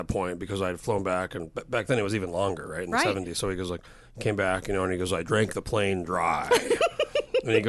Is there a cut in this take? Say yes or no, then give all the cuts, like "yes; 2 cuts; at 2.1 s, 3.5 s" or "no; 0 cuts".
no; 0 cuts